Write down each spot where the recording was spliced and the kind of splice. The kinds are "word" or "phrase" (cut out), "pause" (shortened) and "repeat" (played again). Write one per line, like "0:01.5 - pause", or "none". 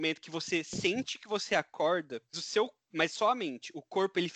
0:02.3 - word